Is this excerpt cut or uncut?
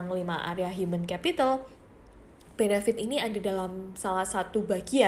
uncut